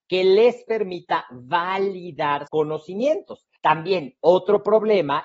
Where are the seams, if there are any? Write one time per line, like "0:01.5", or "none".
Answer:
0:02.5
0:03.6